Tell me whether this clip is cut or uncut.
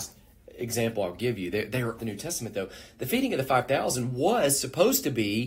cut